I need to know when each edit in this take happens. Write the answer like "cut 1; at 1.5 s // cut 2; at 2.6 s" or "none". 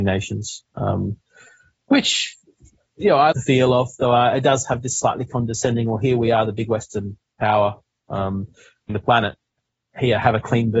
cut 1; at 3.3 s // cut 2; at 8.9 s